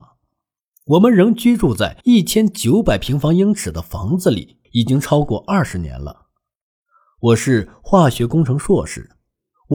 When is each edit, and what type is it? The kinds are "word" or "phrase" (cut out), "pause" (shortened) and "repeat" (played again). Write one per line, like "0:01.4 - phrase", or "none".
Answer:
0:02.0 - pause
0:04.6 - pause